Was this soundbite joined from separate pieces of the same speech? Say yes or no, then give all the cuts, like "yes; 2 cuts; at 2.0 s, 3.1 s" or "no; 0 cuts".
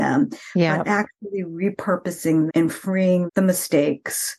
yes; 2 cuts; at 2.5 s, 3.3 s